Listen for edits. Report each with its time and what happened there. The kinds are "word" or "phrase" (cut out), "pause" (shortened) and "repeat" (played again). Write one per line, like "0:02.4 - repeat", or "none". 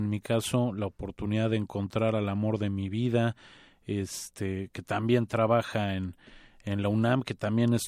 0:04.7 - word